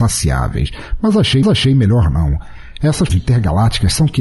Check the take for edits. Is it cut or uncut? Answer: cut